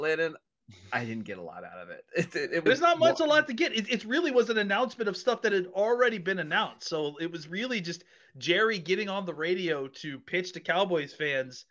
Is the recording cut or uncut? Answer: cut